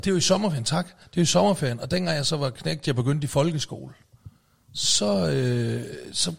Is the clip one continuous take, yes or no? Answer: no